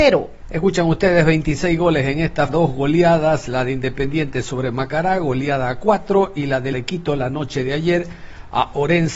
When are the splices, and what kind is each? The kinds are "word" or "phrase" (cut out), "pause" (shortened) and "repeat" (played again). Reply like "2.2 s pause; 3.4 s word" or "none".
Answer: 2.5 s word; 6.7 s word